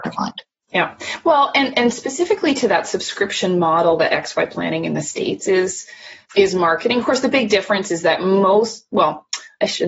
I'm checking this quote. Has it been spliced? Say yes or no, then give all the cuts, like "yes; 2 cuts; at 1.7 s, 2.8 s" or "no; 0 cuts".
yes; 1 cut; at 6.2 s